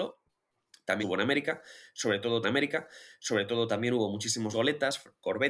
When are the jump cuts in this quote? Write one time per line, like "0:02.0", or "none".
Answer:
0:01.0
0:02.4
0:04.5